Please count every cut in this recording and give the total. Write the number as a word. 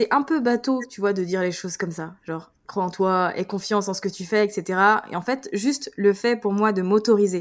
one